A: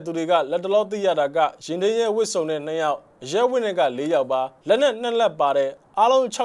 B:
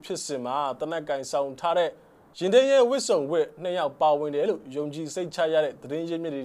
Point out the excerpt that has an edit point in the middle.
A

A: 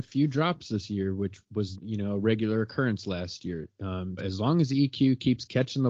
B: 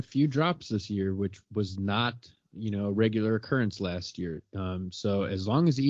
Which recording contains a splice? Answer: A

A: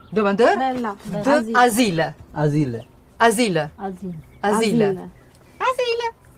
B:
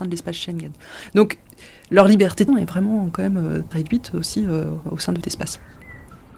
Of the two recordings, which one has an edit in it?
B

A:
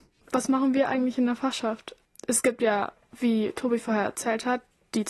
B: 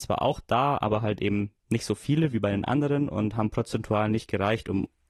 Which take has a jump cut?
B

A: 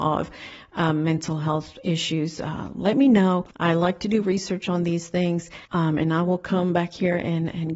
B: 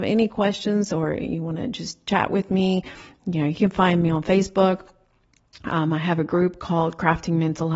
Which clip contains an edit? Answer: A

